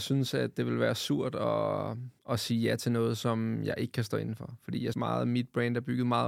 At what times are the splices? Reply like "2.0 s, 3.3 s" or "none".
2.2 s, 4.9 s